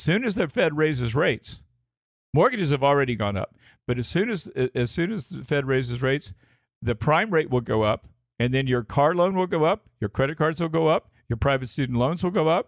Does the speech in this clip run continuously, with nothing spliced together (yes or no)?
yes